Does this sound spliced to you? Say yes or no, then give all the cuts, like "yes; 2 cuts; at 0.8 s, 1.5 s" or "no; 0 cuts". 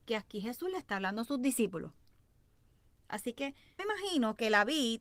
yes; 1 cut; at 3.8 s